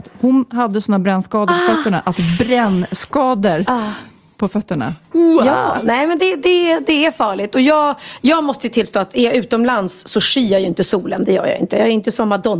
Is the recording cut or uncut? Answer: uncut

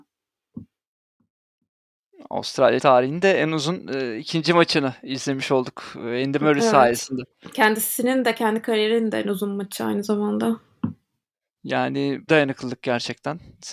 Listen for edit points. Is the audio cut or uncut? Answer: cut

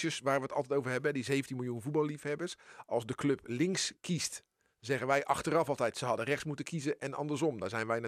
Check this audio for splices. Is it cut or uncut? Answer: uncut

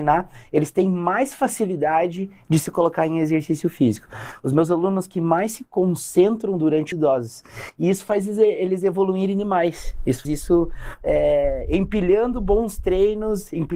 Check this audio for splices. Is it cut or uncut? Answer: cut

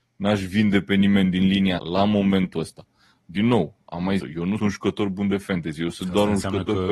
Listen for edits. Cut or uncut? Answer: cut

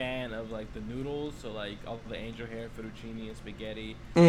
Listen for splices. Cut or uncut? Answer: uncut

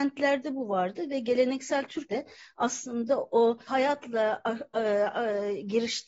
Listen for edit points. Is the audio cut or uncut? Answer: cut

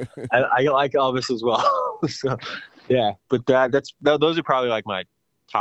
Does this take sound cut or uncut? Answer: uncut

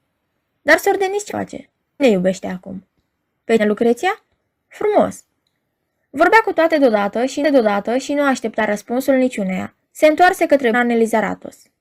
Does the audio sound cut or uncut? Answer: cut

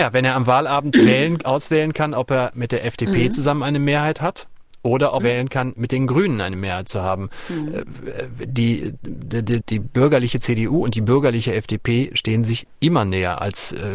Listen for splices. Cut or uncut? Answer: cut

